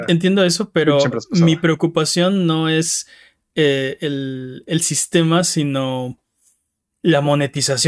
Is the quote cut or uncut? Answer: uncut